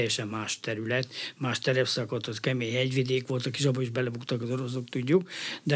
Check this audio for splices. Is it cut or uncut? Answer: uncut